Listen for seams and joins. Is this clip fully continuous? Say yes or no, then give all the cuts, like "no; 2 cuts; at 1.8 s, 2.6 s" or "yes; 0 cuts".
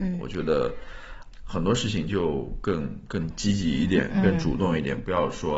no; 1 cut; at 1.3 s